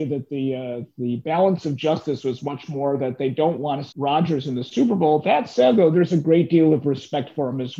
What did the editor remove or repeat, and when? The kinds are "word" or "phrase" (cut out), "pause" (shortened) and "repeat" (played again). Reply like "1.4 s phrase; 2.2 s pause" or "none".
3.9 s word